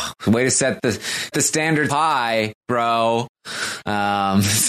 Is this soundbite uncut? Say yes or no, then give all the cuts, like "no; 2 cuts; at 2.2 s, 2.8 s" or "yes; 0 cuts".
no; 2 cuts; at 1.3 s, 1.9 s